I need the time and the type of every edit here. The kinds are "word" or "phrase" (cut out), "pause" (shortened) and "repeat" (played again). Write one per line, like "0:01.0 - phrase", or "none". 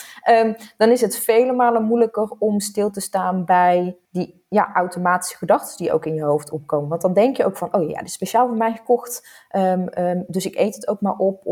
0:04.0 - pause